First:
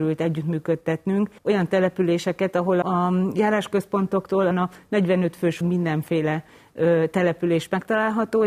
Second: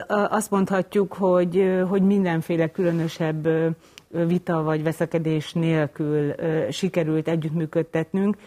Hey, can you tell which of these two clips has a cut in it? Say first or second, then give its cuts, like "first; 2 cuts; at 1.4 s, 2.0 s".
first; 4 cuts; at 1.4 s, 2.8 s, 4.5 s, 5.6 s